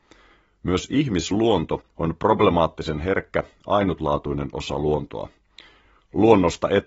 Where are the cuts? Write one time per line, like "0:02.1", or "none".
0:01.9